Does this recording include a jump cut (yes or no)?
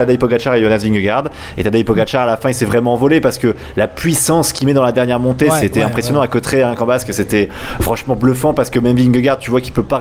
no